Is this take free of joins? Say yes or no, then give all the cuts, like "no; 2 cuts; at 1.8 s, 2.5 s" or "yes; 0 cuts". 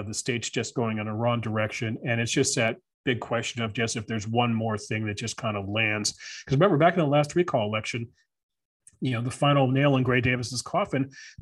yes; 0 cuts